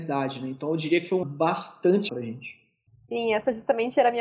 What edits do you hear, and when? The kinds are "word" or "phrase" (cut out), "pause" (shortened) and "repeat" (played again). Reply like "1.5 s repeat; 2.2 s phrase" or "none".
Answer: 1.2 s word; 2.1 s word